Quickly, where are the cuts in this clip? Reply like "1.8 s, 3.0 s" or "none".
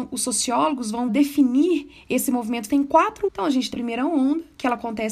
1.1 s, 2.7 s, 3.3 s, 3.7 s